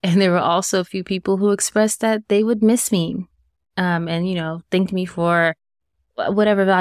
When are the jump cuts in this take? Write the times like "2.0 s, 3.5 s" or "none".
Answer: none